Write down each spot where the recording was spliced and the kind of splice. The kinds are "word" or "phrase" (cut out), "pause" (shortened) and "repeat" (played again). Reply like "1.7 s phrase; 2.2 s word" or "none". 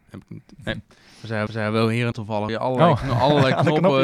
1.5 s repeat; 2.1 s word; 2.5 s word